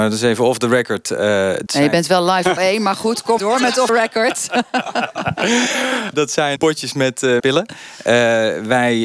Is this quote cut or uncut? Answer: cut